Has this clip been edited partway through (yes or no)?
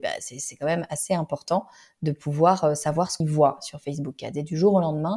yes